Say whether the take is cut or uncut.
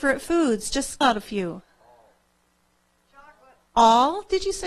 cut